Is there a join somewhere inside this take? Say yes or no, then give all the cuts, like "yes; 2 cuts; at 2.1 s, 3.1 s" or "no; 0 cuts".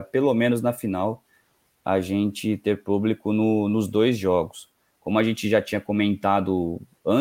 no; 0 cuts